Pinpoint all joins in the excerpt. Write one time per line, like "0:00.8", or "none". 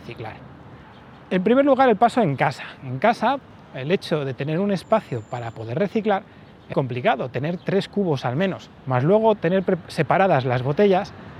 0:02.8
0:03.5
0:06.7
0:08.8

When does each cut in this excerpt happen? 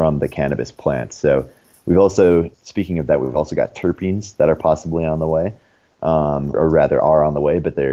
0:02.5
0:06.5

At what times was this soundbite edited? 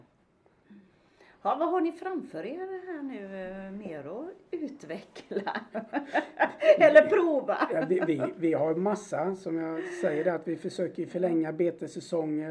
none

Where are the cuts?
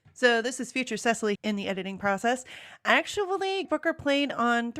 0:01.4
0:03.6

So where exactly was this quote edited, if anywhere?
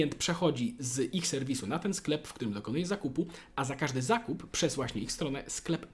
none

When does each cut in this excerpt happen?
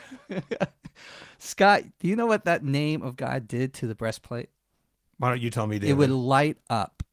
none

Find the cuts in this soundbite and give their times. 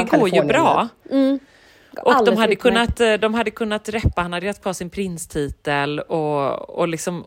none

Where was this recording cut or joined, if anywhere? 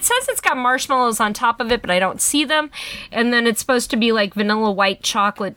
none

